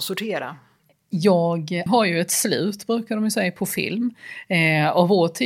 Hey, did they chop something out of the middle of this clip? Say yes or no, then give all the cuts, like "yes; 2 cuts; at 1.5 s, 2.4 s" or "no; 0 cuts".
yes; 1 cut; at 1.9 s